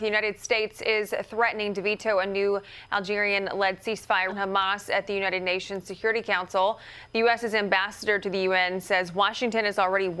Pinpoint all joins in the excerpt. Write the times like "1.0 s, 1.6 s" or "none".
4.3 s